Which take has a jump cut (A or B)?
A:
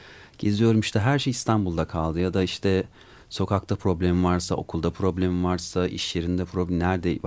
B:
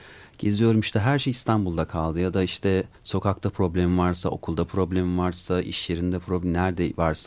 B